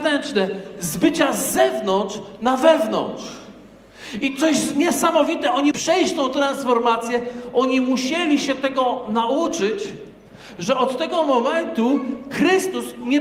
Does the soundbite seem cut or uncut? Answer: cut